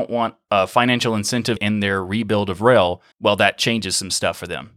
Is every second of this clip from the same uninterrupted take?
no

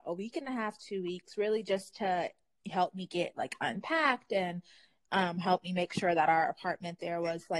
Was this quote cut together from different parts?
no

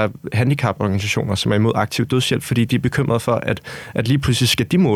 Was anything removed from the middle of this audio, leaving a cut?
no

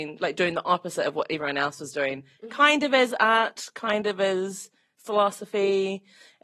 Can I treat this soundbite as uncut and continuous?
yes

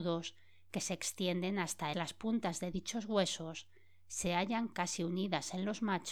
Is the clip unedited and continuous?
no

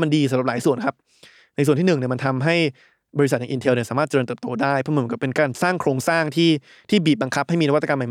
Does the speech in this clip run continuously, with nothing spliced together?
yes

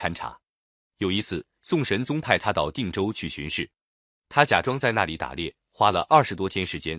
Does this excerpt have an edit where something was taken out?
no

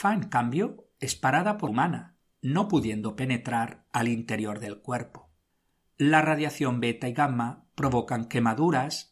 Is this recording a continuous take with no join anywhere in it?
no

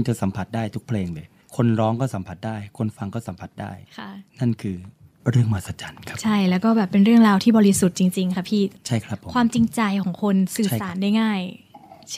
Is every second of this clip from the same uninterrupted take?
no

